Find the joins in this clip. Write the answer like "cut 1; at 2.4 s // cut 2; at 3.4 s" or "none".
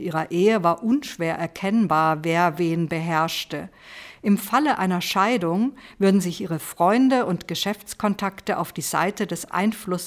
none

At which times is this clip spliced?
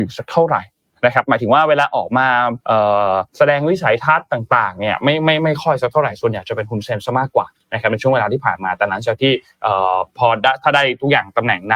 cut 1; at 2.6 s // cut 2; at 3.3 s

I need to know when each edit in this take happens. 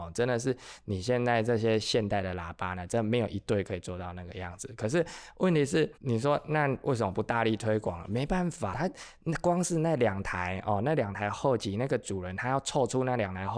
cut 1; at 6.0 s // cut 2; at 8.7 s

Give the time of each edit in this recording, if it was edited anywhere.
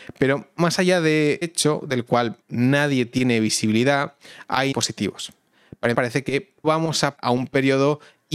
cut 1; at 1.4 s // cut 2; at 2.4 s // cut 3; at 4.7 s // cut 4; at 5.9 s // cut 5; at 6.6 s // cut 6; at 7.2 s

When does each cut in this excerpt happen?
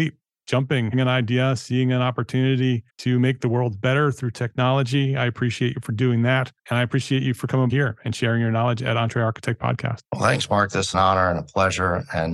cut 1; at 0.9 s // cut 2; at 2.9 s // cut 3; at 6.6 s // cut 4; at 7.7 s // cut 5; at 10.0 s // cut 6; at 10.9 s

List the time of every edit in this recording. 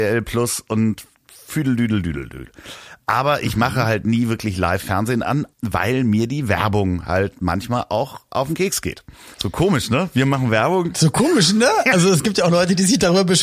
cut 1; at 5.5 s // cut 2; at 9.3 s

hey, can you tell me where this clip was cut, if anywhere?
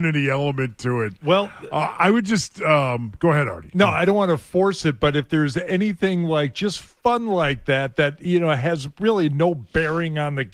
none

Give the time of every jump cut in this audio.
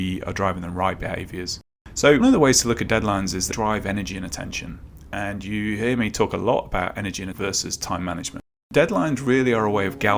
cut 1; at 2.2 s // cut 2; at 3.5 s // cut 3; at 7.3 s

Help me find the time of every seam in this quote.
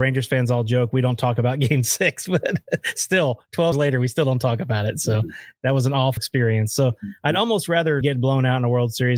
cut 1; at 3.7 s // cut 2; at 6.2 s // cut 3; at 8.0 s

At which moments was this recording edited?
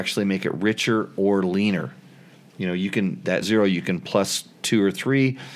cut 1; at 3.4 s

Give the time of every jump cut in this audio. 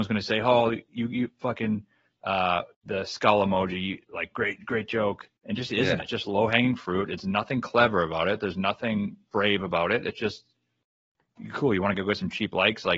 cut 1; at 2.7 s // cut 2; at 4.0 s // cut 3; at 5.4 s

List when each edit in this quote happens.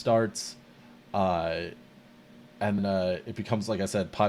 cut 1; at 2.8 s

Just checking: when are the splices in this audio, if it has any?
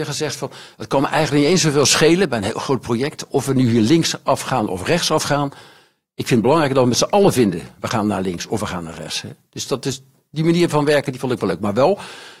none

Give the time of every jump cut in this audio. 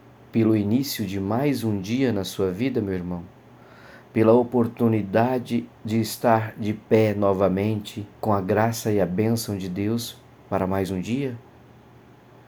cut 1; at 5.8 s // cut 2; at 8.1 s

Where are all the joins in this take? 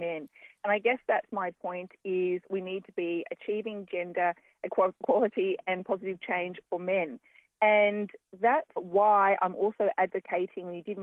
cut 1; at 6.6 s // cut 2; at 8.8 s

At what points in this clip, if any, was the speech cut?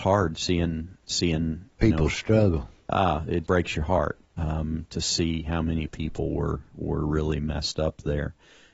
cut 1; at 3.4 s

